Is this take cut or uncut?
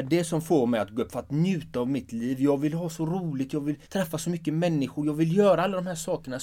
cut